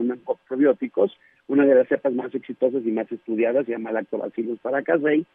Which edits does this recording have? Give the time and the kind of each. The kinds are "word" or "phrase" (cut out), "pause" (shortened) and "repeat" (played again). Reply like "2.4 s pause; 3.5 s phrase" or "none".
none